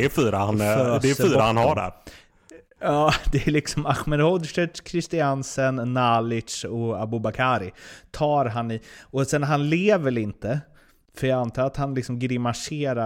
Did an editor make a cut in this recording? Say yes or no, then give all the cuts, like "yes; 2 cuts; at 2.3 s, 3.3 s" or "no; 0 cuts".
no; 0 cuts